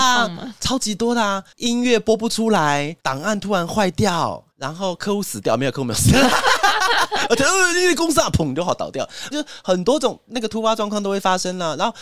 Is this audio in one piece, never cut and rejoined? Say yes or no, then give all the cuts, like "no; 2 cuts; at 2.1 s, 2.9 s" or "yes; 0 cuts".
no; 4 cuts; at 1.5 s, 3.0 s, 4.5 s, 9.3 s